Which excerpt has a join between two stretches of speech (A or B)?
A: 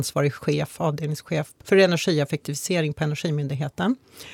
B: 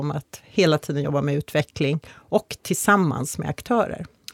A